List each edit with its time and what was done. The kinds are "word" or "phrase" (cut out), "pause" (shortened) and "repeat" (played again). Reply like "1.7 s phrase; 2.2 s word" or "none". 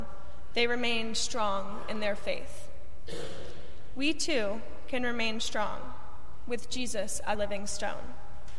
7.3 s word